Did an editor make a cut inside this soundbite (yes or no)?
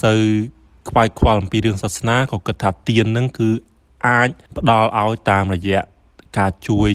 no